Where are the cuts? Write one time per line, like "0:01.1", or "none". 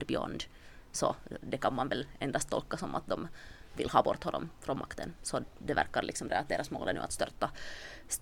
0:06.3